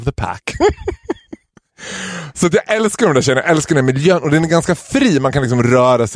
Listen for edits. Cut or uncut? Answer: uncut